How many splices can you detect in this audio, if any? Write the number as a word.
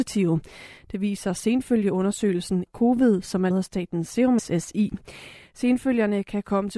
three